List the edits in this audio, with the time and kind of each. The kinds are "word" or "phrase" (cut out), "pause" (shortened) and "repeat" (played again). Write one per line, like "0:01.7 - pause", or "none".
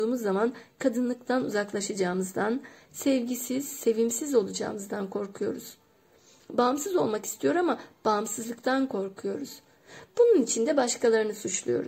none